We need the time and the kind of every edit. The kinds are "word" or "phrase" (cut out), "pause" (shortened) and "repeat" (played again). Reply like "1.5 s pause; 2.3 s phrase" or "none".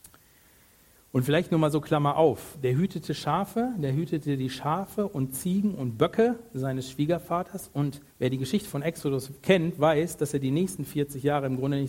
8.1 s pause